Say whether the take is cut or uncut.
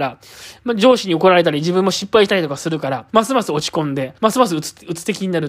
cut